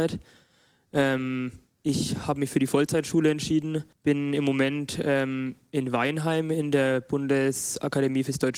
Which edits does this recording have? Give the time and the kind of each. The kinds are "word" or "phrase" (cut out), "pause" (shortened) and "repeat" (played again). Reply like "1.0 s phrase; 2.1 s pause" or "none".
3.9 s pause